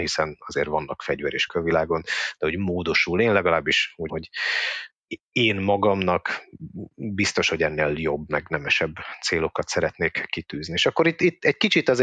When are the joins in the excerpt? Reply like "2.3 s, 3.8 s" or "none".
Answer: 1.5 s, 4.1 s

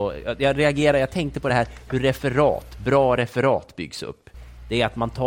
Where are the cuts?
none

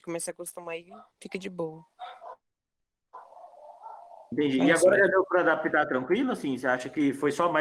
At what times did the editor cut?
1.1 s

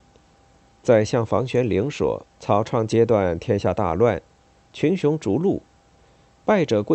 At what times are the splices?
2.3 s

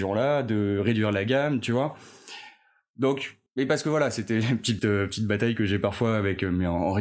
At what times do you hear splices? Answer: 3.5 s, 4.8 s

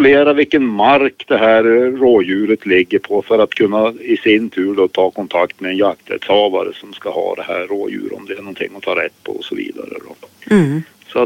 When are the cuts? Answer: none

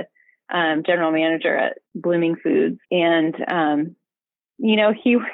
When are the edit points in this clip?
1.9 s, 2.8 s

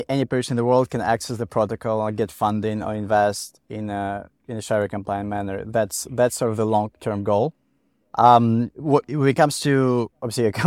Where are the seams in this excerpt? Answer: none

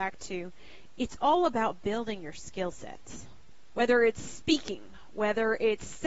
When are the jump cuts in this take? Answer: none

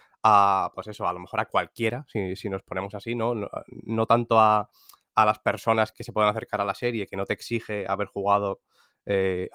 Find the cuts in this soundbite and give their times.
5.9 s

